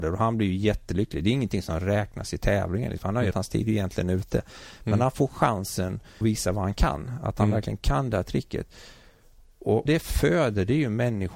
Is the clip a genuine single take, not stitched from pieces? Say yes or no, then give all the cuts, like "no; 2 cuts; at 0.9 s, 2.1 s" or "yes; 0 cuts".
no; 3 cuts; at 3.3 s, 6.2 s, 9.9 s